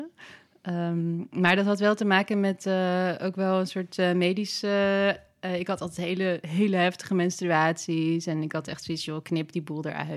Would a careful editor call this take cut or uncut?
uncut